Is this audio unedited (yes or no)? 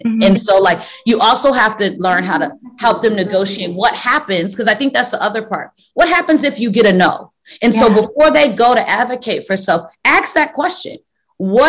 yes